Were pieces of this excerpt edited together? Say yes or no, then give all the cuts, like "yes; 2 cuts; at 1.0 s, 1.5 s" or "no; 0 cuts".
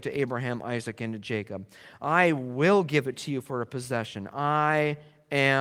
no; 0 cuts